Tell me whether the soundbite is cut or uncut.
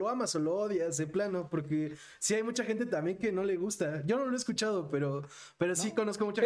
uncut